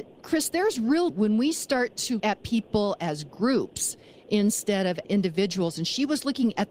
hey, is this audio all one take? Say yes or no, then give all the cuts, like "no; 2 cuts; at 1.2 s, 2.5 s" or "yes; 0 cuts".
no; 3 cuts; at 1.1 s, 2.2 s, 5.0 s